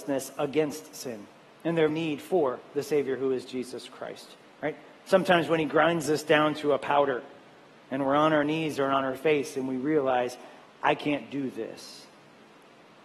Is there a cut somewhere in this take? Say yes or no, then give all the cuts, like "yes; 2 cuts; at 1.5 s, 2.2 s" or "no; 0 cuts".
yes; 1 cut; at 1.9 s